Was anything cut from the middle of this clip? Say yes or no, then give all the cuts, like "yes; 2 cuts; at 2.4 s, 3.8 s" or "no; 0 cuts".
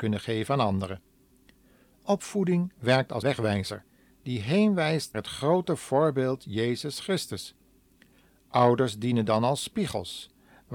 yes; 2 cuts; at 3.2 s, 5.1 s